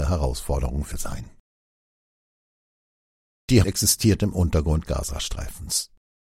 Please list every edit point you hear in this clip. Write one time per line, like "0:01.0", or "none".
0:00.9
0:03.6
0:04.8